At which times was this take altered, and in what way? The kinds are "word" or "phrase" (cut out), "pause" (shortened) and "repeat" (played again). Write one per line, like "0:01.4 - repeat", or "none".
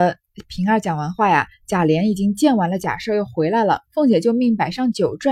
0:03.9 - pause